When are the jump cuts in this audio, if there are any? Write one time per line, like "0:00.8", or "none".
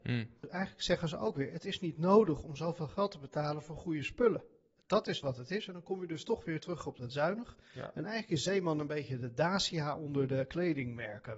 0:05.2